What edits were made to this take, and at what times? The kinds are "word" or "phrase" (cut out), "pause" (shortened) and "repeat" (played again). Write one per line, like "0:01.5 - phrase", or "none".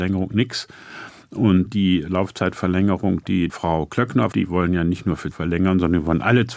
0:01.7 - word
0:03.5 - word
0:04.3 - word
0:05.3 - phrase